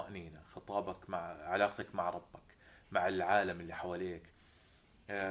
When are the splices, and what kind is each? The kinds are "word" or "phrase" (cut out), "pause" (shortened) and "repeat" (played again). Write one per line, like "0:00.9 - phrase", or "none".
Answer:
none

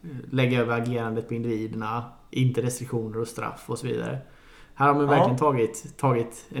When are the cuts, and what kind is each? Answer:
none

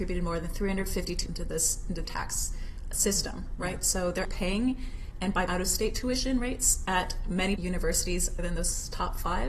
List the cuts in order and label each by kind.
0:01.3 - word
0:02.0 - word
0:04.2 - word
0:05.5 - word
0:06.9 - word
0:07.6 - word
0:08.4 - word

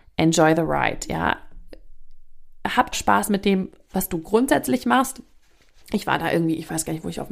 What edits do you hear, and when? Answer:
0:02.9 - word

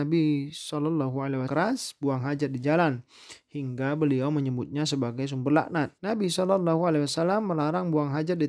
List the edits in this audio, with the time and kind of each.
0:01.5 - phrase
0:06.0 - pause

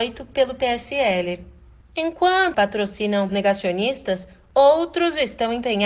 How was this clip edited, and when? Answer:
0:02.5 - word
0:03.3 - word

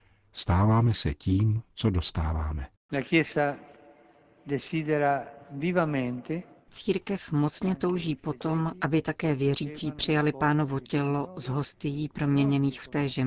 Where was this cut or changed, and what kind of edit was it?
none

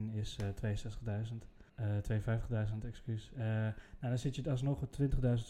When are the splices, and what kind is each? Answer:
0:01.7 - pause

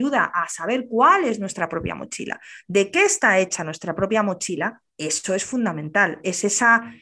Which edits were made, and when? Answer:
0:04.9 - pause

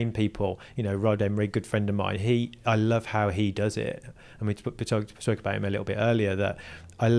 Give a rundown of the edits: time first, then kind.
none

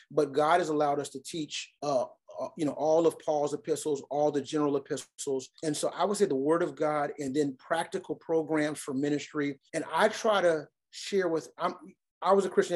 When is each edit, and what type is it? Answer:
0:01.8 - pause
0:05.5 - pause
0:09.7 - pause

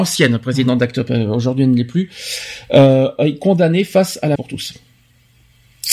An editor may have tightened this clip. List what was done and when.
0:04.4 - word

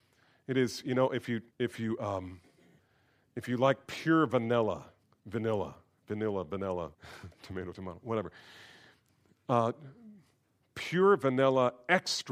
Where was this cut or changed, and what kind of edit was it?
0:01.5 - pause
0:02.8 - pause
0:05.0 - pause
0:06.9 - pause

